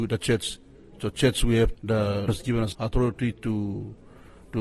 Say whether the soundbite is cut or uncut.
cut